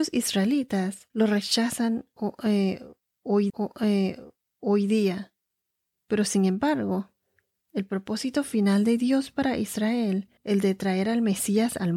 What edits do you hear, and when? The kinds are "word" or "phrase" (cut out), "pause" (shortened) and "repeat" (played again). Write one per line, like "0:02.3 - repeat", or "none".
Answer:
0:01.1 - pause
0:03.5 - repeat
0:10.4 - pause